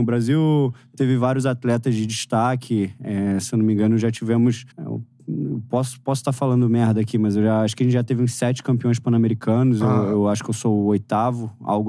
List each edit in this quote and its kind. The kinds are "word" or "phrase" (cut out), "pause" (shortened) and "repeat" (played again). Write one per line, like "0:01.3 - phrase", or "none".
0:04.7 - pause